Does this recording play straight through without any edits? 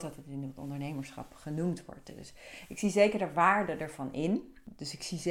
yes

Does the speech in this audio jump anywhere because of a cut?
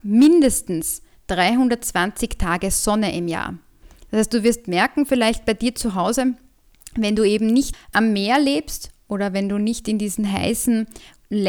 no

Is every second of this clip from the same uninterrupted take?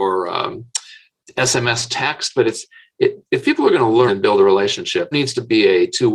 no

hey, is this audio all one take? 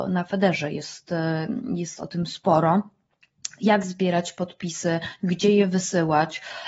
yes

